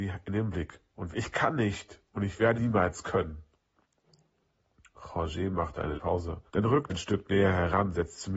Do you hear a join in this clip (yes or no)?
yes